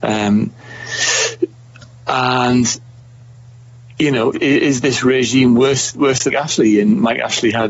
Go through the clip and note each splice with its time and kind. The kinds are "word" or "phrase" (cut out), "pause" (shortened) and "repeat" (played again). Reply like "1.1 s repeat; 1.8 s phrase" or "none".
4.3 s word; 5.9 s word; 6.3 s word